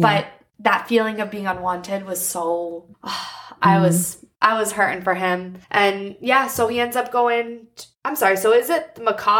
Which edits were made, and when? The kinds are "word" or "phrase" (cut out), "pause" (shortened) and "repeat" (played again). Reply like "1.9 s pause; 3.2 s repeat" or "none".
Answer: 2.9 s pause; 5.6 s pause